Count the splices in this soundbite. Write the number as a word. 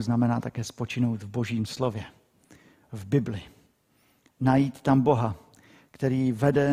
zero